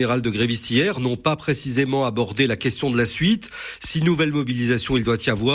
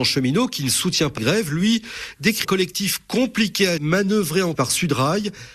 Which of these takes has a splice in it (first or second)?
second